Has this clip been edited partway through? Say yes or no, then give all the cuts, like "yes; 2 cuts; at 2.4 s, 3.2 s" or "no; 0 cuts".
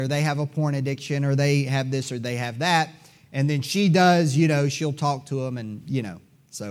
no; 0 cuts